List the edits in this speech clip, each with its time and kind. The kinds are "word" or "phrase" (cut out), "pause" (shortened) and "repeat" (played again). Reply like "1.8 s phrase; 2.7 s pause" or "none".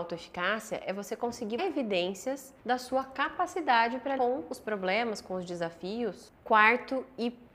1.6 s word; 2.6 s pause; 4.2 s word